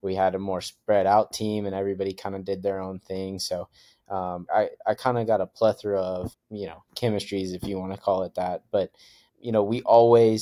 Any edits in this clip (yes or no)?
yes